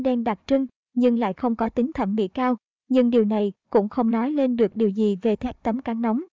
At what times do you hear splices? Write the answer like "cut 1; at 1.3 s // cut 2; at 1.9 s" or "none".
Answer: none